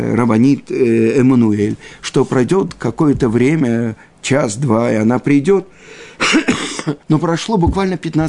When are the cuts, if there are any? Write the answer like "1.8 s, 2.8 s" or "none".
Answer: 7.0 s